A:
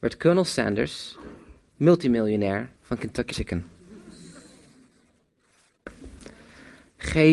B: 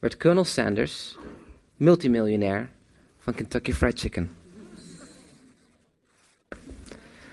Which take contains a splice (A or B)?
A